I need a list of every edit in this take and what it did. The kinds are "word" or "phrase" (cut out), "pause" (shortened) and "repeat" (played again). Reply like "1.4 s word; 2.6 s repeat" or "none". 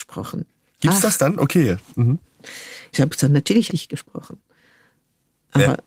2.9 s word; 3.7 s phrase